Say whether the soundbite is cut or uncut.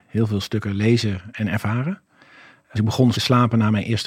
cut